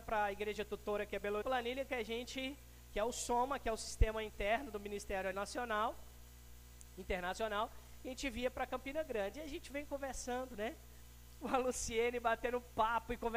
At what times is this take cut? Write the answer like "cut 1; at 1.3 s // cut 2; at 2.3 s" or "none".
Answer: cut 1; at 1.4 s // cut 2; at 5.3 s

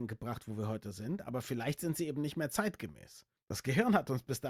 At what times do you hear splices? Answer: none

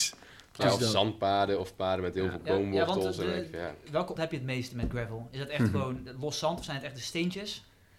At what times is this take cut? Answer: cut 1; at 4.2 s

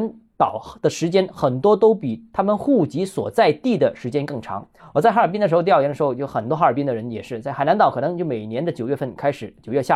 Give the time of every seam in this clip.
cut 1; at 4.8 s

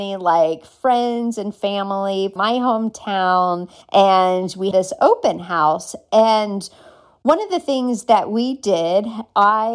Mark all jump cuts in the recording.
cut 1; at 2.4 s // cut 2; at 3.8 s // cut 3; at 4.7 s

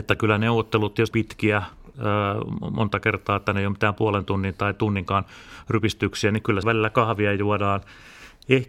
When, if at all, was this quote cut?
cut 1; at 1.1 s // cut 2; at 6.6 s

